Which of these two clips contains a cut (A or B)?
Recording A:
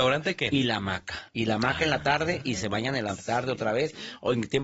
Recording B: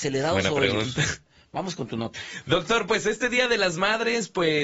A